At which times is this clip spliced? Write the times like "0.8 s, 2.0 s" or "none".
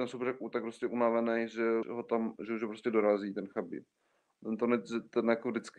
1.8 s

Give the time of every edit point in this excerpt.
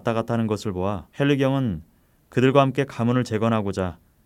1.1 s

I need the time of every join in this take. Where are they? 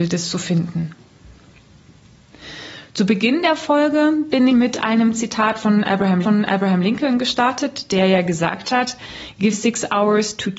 4.5 s, 6.2 s, 9.5 s

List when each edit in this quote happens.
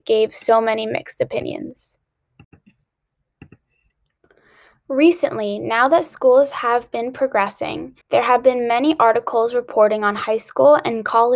8.0 s

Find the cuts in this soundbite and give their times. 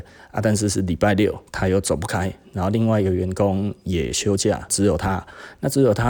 1.5 s, 4.7 s

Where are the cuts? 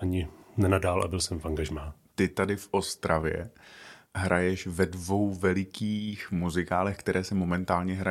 none

